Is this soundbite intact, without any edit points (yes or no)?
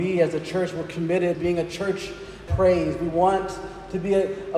no